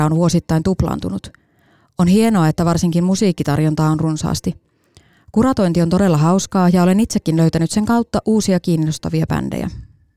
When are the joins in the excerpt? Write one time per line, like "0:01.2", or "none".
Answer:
none